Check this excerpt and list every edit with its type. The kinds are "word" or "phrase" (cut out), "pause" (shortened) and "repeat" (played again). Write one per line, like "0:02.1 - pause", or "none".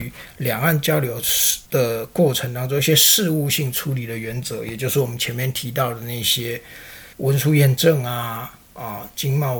0:01.6 - pause
0:07.1 - pause